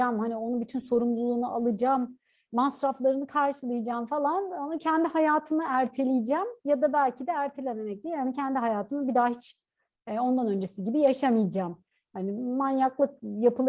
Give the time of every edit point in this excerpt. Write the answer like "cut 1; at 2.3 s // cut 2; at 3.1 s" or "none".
none